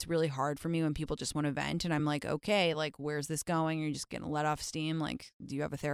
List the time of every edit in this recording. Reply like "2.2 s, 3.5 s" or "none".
none